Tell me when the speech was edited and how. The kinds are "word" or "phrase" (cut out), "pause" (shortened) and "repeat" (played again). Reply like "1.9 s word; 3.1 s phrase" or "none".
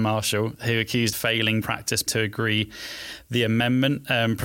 1.1 s phrase; 1.6 s word; 2.1 s word